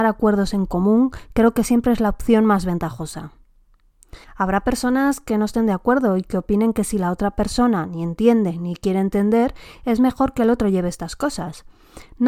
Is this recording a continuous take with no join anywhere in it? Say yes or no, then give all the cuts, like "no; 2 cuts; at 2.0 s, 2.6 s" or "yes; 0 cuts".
no; 1 cut; at 4.2 s